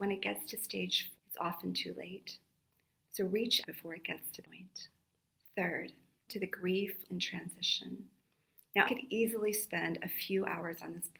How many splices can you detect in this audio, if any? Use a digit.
6